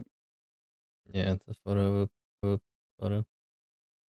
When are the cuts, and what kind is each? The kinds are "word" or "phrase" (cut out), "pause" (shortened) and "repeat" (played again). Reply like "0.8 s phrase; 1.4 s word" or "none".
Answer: 2.4 s repeat